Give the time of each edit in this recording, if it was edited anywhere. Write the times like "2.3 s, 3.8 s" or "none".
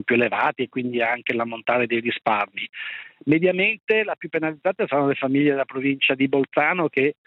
none